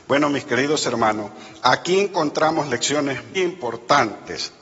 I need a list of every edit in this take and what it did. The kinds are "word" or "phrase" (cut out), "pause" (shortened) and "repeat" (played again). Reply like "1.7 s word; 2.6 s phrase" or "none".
3.3 s word